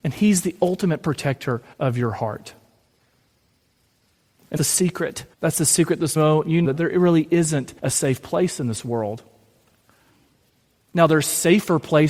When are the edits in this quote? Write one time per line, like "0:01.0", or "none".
0:01.7
0:04.6
0:05.3
0:06.2
0:06.6
0:07.8